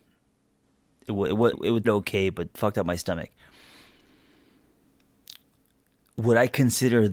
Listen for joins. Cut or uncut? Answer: cut